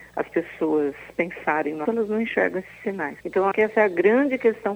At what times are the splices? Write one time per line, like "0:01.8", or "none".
0:01.9
0:03.2
0:03.5